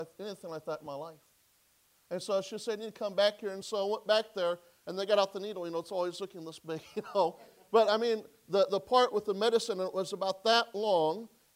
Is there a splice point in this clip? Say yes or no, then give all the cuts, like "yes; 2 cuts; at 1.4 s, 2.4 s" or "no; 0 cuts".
no; 0 cuts